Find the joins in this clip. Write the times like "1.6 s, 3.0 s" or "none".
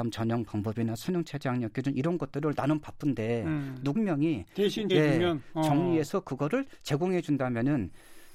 3.9 s, 4.9 s